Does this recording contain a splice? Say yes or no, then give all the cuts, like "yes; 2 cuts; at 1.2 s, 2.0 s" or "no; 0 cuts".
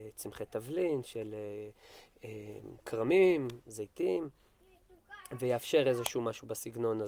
no; 0 cuts